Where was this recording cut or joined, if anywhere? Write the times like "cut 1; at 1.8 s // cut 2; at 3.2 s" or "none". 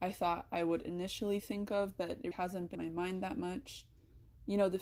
cut 1; at 2.3 s // cut 2; at 2.7 s